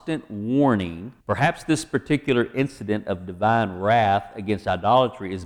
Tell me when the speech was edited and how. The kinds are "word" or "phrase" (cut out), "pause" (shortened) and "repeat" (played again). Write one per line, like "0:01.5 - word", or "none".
0:01.2 - pause